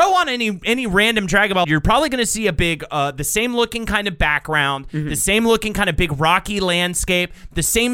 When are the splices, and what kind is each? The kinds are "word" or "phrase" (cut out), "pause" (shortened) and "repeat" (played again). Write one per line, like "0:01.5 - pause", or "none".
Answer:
0:01.6 - word